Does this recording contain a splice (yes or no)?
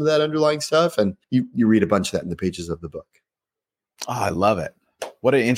yes